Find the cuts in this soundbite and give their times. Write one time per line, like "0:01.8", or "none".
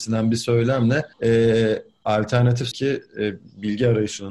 0:01.1
0:02.7